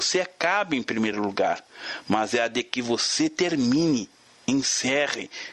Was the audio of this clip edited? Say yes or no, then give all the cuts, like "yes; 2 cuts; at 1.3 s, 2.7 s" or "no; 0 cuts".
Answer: no; 0 cuts